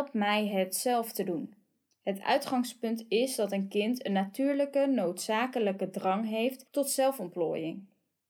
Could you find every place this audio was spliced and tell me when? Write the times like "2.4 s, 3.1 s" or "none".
1.9 s